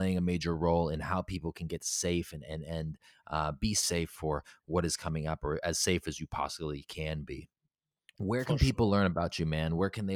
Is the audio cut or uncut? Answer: uncut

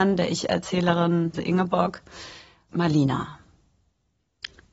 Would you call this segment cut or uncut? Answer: cut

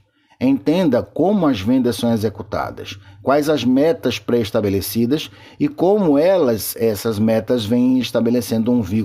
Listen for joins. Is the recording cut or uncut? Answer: uncut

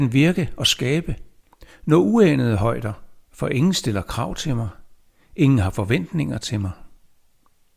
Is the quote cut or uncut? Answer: cut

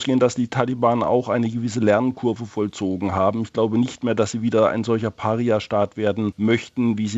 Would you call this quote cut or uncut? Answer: uncut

